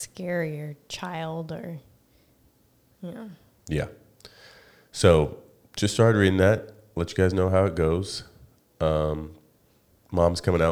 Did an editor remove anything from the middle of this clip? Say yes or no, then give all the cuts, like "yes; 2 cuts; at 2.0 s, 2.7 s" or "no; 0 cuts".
no; 0 cuts